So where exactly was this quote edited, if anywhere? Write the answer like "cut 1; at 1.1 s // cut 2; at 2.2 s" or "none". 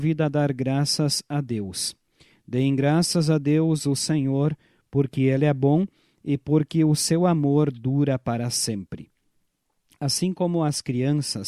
none